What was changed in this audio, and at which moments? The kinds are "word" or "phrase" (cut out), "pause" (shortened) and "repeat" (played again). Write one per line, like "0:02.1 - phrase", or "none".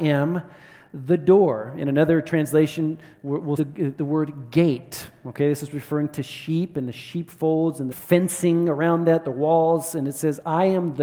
0:03.6 - word
0:07.9 - phrase